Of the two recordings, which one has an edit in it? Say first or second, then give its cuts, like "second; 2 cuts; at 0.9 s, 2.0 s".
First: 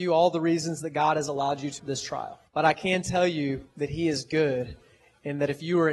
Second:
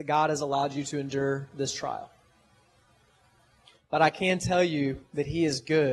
first; 2 cuts; at 1.8 s, 2.5 s